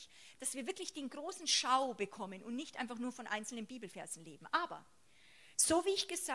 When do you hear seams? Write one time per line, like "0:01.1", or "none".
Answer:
none